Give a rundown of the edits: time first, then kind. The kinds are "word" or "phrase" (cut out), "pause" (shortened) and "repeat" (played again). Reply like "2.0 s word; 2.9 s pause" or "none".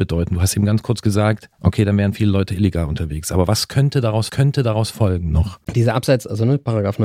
4.3 s repeat; 5.6 s pause